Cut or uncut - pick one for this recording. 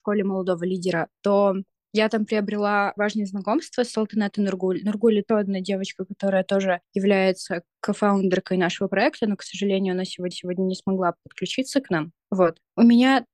cut